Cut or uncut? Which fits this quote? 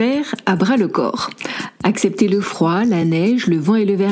uncut